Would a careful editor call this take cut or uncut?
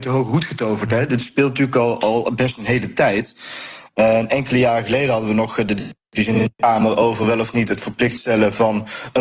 cut